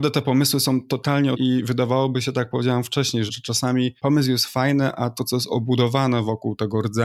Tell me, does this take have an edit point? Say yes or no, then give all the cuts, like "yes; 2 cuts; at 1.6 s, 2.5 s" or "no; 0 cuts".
yes; 4 cuts; at 1.3 s, 3.3 s, 4.0 s, 5.2 s